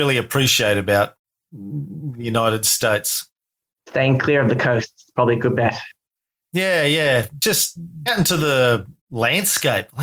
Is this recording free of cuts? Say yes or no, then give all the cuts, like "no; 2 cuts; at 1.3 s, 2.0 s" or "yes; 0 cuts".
no; 1 cut; at 8.1 s